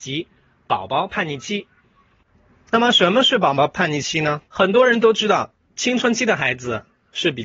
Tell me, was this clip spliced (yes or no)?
yes